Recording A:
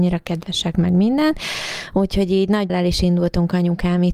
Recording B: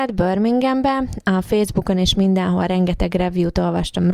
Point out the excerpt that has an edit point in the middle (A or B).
A